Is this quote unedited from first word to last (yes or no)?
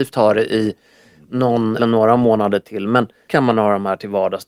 no